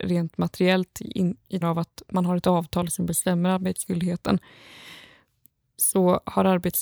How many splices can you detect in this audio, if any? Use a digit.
1